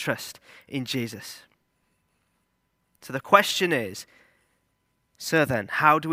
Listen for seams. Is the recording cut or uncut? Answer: uncut